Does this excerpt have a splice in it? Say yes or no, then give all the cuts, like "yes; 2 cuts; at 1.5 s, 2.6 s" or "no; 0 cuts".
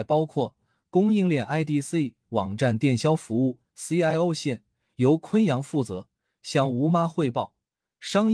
no; 0 cuts